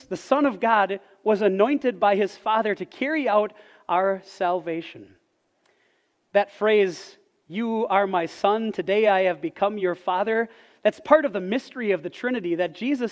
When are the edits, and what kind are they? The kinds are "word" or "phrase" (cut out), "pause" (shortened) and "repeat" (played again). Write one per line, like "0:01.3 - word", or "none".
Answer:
none